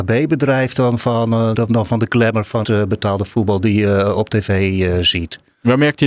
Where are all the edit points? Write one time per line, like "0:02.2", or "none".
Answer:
0:01.5
0:02.6